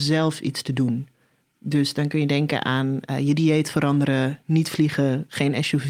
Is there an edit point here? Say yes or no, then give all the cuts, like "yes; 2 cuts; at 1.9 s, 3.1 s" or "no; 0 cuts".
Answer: no; 0 cuts